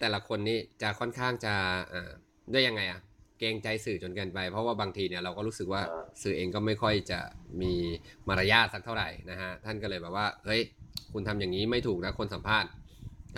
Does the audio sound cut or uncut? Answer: uncut